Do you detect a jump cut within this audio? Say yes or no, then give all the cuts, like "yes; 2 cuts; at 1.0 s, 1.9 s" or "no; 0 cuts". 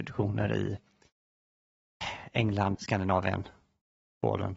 yes; 1 cut; at 2.7 s